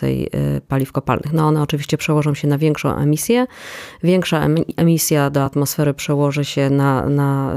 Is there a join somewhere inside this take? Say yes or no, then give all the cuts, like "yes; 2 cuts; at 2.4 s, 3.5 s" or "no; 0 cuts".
no; 0 cuts